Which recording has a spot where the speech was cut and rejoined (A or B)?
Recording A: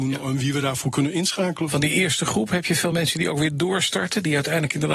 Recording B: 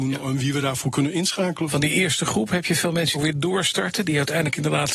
B